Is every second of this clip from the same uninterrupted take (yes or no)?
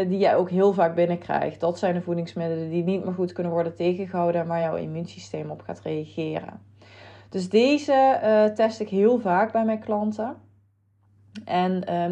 yes